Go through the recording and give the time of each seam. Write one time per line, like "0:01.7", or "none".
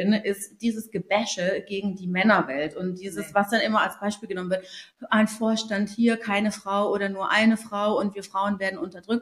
none